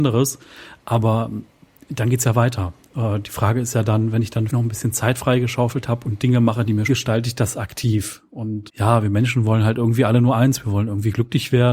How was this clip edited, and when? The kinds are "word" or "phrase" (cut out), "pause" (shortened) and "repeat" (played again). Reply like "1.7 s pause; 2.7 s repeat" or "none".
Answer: 4.5 s word; 6.9 s phrase; 8.7 s word